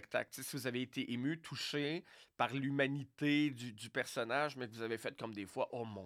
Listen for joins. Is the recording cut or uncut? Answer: uncut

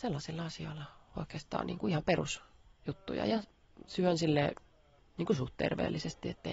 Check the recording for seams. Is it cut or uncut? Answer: uncut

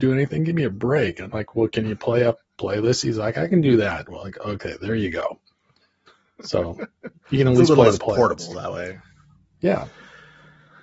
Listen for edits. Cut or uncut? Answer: uncut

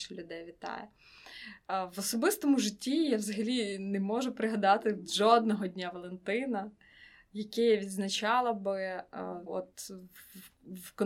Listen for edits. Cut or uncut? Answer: cut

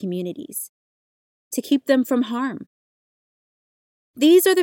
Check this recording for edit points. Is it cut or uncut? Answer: uncut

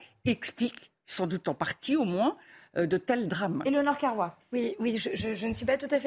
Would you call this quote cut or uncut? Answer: uncut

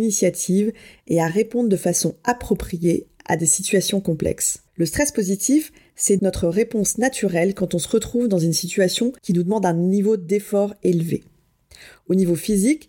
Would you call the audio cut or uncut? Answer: cut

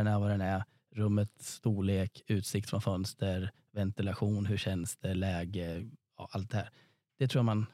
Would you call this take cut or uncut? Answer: uncut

